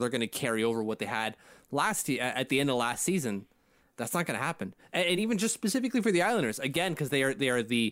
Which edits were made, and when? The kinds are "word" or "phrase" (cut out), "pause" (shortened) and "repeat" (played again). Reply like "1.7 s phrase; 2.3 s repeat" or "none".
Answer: none